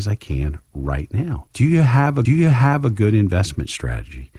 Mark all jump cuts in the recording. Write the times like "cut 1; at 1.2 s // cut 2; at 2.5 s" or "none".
cut 1; at 1.5 s // cut 2; at 2.3 s